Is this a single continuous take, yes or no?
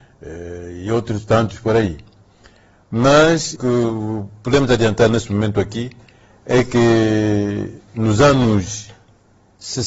no